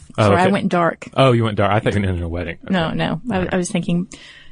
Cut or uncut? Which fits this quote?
cut